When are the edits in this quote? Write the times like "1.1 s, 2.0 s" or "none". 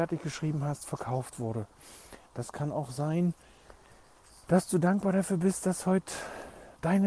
none